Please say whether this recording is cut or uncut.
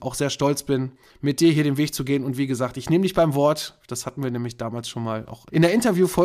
uncut